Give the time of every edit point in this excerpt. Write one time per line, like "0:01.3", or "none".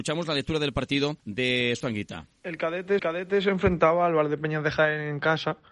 0:01.2
0:01.8
0:03.0